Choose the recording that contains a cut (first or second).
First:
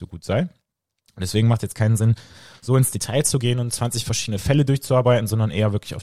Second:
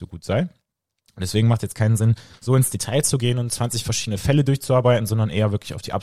second